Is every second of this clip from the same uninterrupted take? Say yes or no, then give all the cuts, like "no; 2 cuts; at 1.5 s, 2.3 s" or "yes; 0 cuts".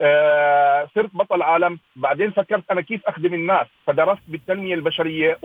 no; 2 cuts; at 1.8 s, 3.7 s